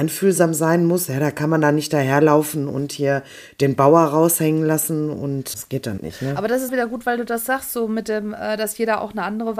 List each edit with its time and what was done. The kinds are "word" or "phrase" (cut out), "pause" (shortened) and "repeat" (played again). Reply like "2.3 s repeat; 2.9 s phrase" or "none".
5.5 s word; 6.0 s word; 6.7 s word